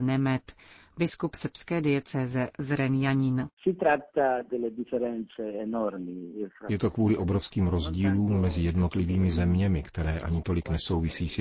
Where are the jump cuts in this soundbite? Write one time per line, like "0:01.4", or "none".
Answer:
none